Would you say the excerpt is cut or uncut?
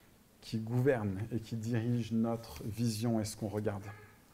uncut